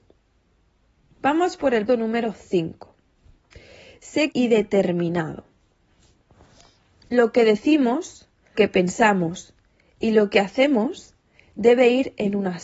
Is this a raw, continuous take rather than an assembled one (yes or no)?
no